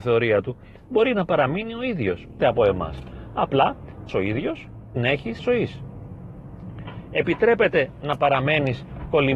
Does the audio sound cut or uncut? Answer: cut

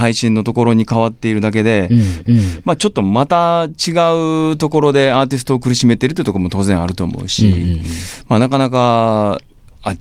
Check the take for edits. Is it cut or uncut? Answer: cut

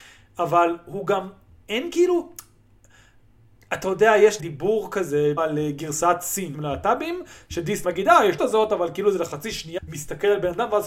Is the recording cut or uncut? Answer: cut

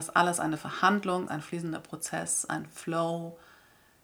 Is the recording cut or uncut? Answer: cut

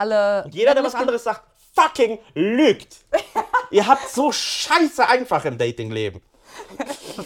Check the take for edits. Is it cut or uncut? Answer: uncut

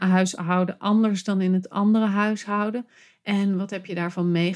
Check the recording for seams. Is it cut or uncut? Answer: uncut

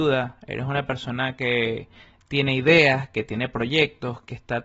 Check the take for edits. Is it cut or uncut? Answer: uncut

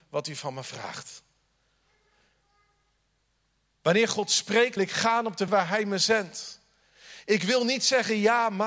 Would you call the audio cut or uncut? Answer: cut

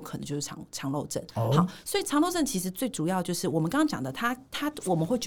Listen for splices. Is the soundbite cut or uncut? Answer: uncut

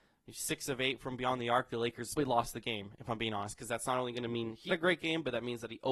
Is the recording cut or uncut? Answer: cut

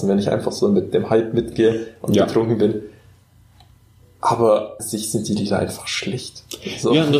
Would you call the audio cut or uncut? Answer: cut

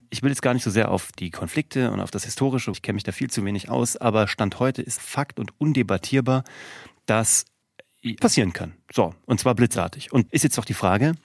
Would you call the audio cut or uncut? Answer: cut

